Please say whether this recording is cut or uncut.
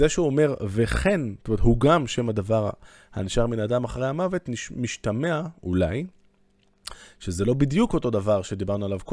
uncut